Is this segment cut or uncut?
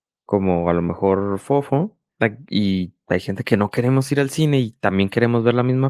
uncut